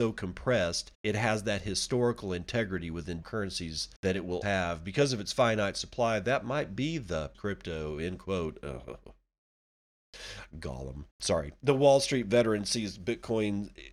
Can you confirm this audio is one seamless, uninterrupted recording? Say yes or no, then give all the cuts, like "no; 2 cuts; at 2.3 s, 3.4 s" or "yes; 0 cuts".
no; 6 cuts; at 0.9 s, 3.2 s, 4.0 s, 4.4 s, 7.3 s, 11.1 s